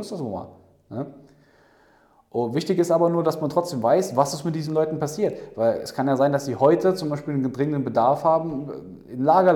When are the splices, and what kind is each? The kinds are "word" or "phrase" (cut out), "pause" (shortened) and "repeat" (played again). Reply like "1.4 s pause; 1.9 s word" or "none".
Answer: none

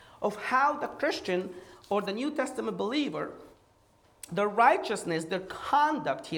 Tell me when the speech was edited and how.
none

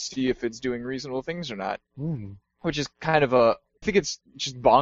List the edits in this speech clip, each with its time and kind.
1.9 s pause; 3.8 s word

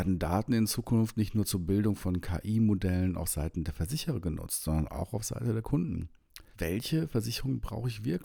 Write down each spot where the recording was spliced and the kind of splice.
6.5 s pause

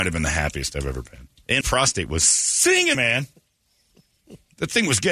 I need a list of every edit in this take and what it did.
1.6 s word; 2.9 s word

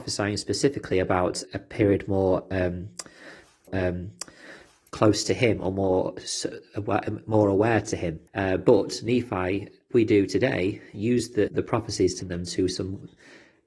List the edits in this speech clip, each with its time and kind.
1.4 s word; 3.7 s repeat; 8.3 s pause; 9.9 s word; 11.5 s word; 12.2 s word

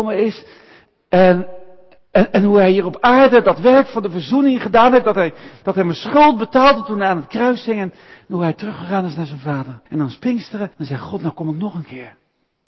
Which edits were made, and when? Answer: 2.0 s pause; 9.9 s pause; 10.7 s pause

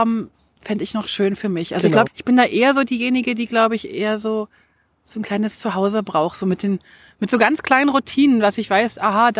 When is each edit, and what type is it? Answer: 2.1 s word

